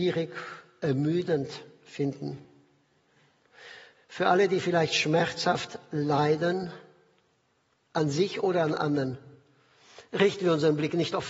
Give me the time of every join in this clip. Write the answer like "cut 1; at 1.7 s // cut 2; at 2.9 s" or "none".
none

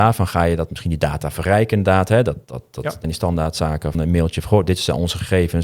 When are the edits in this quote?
cut 1; at 2.4 s // cut 2; at 3.0 s // cut 3; at 3.9 s

